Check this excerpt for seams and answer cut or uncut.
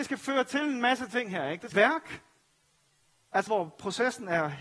cut